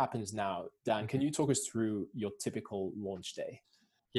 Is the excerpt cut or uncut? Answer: uncut